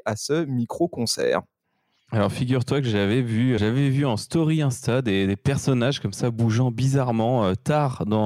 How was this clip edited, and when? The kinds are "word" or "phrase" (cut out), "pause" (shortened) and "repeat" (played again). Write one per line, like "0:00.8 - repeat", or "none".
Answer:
0:03.6 - word